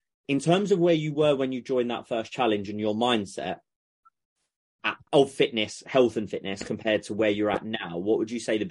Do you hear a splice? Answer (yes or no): no